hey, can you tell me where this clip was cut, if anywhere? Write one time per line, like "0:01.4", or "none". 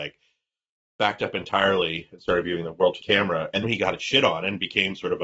0:03.0
0:03.6